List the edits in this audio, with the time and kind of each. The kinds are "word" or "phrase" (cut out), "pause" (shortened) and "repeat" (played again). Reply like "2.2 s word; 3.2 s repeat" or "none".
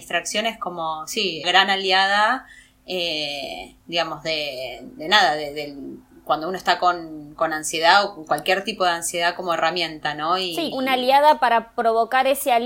1.4 s phrase; 3.8 s pause; 10.7 s phrase